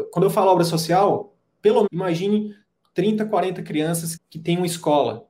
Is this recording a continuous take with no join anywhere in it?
no; 2 cuts; at 1.9 s, 4.2 s

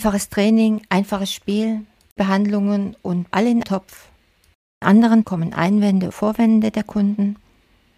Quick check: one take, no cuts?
no; 6 cuts; at 2.2 s, 3.3 s, 3.6 s, 4.8 s, 5.2 s, 6.1 s

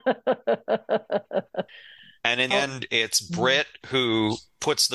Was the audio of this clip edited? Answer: yes; 2 cuts; at 1.7 s, 2.5 s

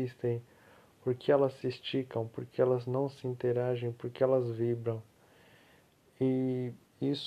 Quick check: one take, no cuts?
no; 1 cut; at 1.6 s

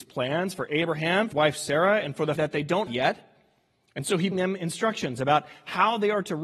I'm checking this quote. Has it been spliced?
yes; 4 cuts; at 1.3 s, 2.4 s, 2.9 s, 4.3 s

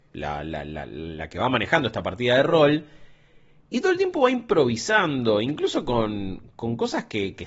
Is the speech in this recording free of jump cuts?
yes; 0 cuts

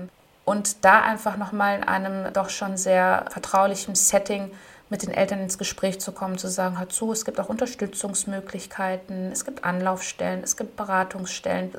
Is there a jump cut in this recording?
no; 0 cuts

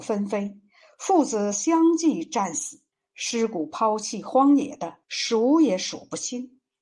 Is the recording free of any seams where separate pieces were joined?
no; 2 cuts; at 2.9 s, 5.0 s

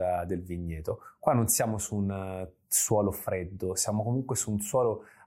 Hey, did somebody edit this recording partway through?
no; 0 cuts

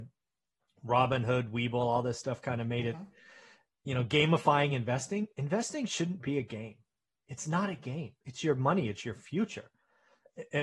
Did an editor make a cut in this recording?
no; 0 cuts

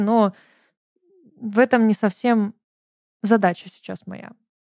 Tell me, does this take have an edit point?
no; 0 cuts

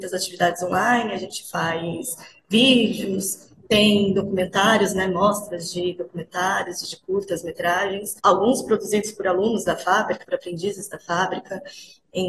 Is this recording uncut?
no; 2 cuts; at 8.2 s, 10.2 s

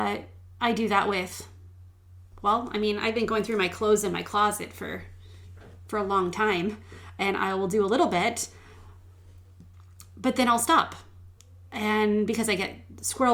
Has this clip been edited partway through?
no; 0 cuts

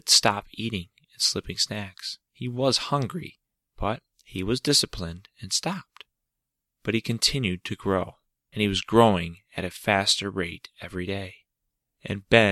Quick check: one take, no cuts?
no; 2 cuts; at 2.2 s, 4.1 s

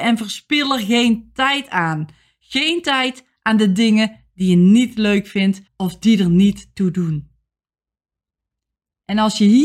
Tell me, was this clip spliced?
yes; 1 cut; at 5.7 s

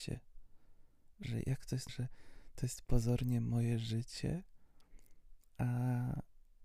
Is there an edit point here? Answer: yes; 1 cut; at 1.9 s

